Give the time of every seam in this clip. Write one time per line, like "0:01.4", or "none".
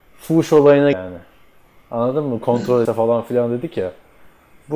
0:00.9
0:02.8

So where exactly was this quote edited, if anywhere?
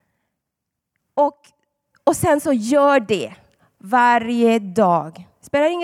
none

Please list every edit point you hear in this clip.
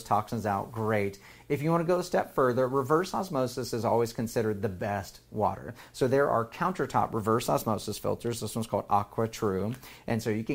none

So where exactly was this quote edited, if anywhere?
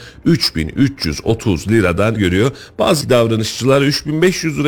0:02.2
0:03.0

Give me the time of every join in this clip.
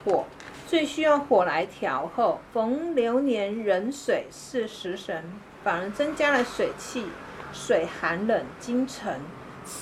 0:02.5

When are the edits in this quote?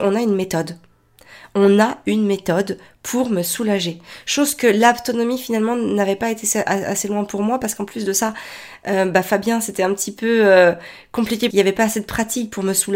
0:11.5

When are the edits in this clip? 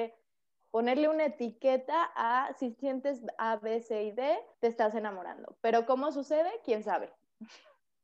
0:04.5

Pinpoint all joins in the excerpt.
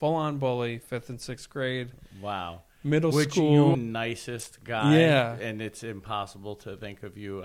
0:03.7

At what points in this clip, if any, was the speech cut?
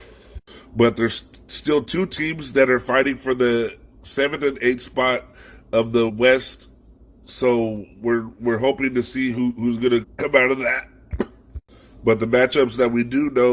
0:06.1
0:10.0

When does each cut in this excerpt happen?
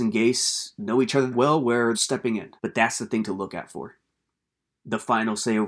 0:01.3
0:01.9
0:02.6

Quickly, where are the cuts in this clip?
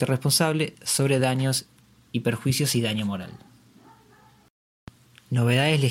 none

